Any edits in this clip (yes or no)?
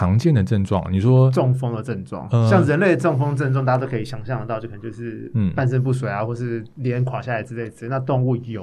yes